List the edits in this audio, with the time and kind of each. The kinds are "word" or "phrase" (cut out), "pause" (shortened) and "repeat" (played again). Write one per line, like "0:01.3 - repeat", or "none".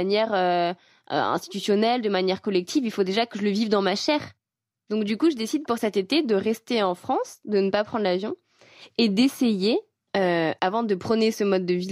none